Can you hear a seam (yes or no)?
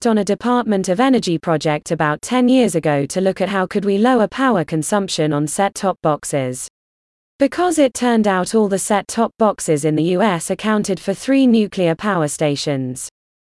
no